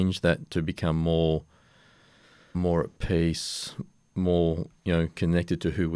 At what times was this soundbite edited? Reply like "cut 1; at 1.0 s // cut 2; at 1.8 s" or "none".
cut 1; at 2.5 s

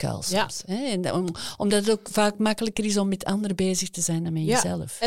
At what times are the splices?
none

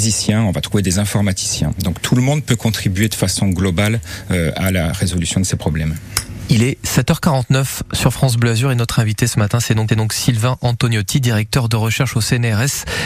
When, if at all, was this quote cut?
cut 1; at 9.9 s

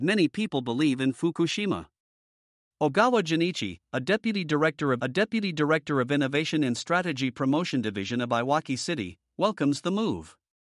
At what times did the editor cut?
cut 1; at 5.0 s

